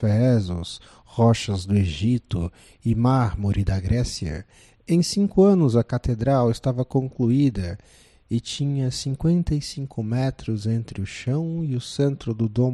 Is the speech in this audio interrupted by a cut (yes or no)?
no